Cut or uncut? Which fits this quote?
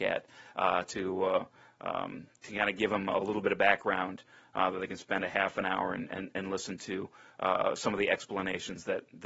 uncut